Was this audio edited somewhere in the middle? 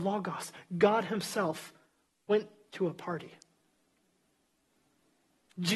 no; 0 cuts

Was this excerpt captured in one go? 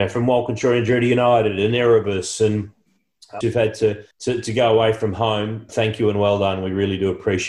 no; 3 cuts; at 3.4 s, 4.1 s, 5.7 s

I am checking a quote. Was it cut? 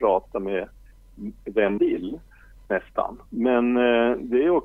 yes; 2 cuts; at 1.8 s, 3.3 s

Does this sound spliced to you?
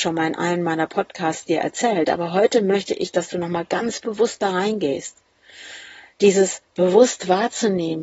no; 0 cuts

